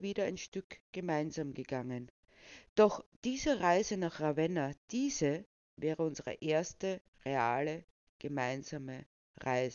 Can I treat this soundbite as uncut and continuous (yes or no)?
yes